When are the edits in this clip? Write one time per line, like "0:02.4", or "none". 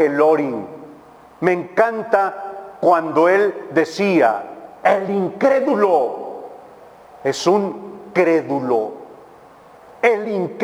none